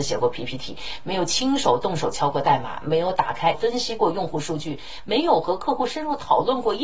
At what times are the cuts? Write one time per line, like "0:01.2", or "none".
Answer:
0:03.5